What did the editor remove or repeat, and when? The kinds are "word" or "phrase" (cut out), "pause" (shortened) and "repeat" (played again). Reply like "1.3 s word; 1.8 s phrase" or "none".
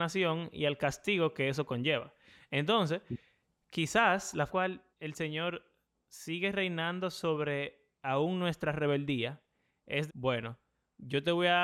4.5 s phrase; 4.9 s pause; 10.1 s word